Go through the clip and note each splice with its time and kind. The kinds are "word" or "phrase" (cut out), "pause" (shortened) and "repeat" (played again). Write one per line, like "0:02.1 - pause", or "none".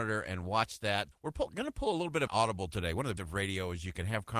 0:01.1 - word
0:02.3 - word
0:03.2 - word